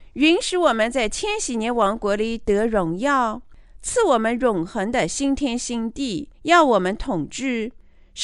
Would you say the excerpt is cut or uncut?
cut